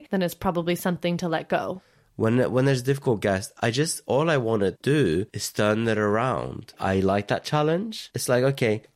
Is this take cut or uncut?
uncut